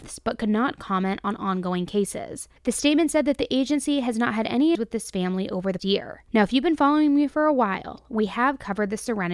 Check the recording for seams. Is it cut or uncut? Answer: cut